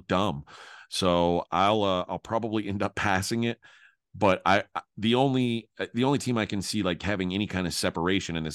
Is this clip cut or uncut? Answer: uncut